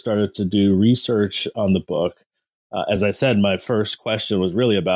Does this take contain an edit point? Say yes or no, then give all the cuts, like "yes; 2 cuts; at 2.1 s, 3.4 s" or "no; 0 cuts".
no; 0 cuts